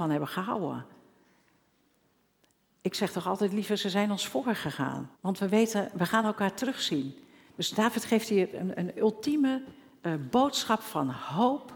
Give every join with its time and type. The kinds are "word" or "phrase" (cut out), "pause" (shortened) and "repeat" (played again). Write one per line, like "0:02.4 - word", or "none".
0:05.1 - pause

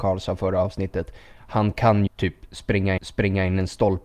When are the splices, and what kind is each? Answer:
0:02.1 - word
0:03.0 - repeat

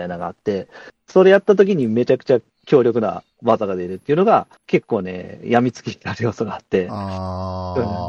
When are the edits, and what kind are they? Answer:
0:04.6 - pause

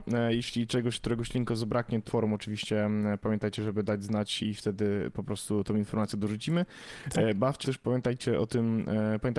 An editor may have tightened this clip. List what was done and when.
0:02.1 - word
0:04.4 - word
0:07.6 - word

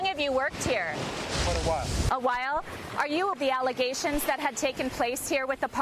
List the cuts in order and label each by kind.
0:03.3 - word

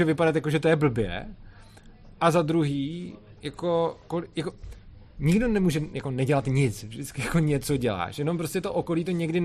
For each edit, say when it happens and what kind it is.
none

